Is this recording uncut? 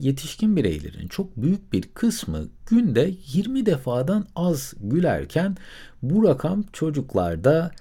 yes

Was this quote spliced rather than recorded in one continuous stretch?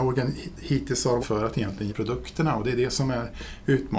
yes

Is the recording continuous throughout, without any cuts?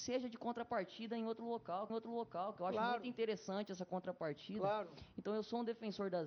no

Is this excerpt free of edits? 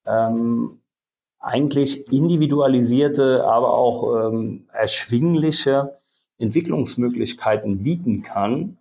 yes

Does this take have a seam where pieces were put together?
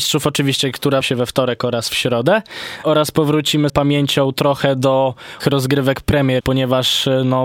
yes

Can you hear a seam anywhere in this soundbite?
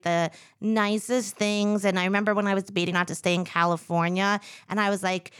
yes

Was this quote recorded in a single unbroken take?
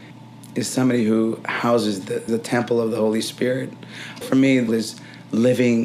no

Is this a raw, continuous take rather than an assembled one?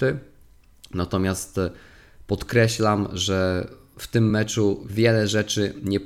yes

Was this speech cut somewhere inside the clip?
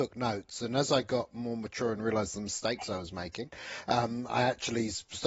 no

